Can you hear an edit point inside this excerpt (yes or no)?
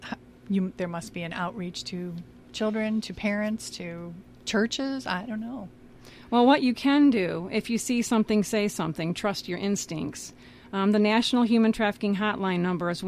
no